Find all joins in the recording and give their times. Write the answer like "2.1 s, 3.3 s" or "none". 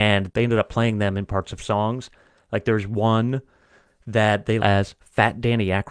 4.6 s